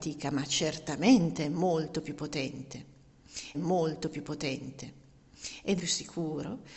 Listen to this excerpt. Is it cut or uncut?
cut